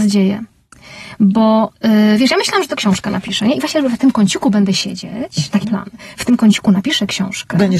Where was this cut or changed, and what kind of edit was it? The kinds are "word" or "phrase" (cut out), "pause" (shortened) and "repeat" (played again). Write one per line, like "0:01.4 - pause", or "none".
0:01.7 - pause
0:02.8 - word
0:05.6 - word